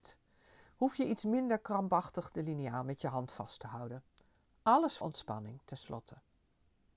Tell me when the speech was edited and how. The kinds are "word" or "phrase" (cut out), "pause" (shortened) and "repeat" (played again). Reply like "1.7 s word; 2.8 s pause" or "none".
5.0 s word